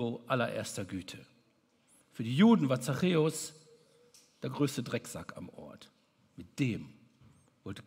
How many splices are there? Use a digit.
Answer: 0